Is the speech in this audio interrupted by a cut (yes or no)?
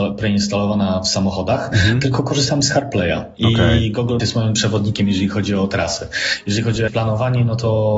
yes